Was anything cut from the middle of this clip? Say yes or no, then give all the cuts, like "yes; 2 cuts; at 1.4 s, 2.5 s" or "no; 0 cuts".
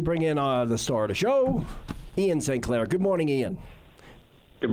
no; 0 cuts